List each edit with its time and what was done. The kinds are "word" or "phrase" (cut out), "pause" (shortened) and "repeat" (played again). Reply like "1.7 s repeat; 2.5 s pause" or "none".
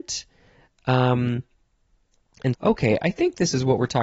2.5 s word